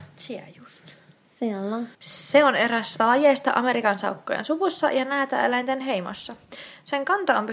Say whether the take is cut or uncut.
cut